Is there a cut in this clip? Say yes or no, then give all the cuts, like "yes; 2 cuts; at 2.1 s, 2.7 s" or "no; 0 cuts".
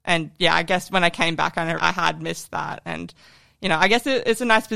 yes; 1 cut; at 1.8 s